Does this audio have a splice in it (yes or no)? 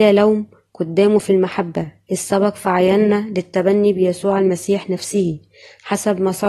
no